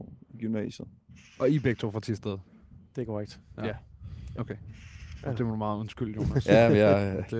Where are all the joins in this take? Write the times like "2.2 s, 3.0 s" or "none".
none